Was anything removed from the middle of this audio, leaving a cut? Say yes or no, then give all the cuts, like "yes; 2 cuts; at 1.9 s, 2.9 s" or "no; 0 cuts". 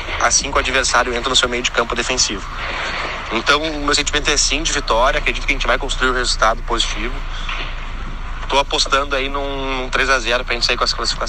no; 0 cuts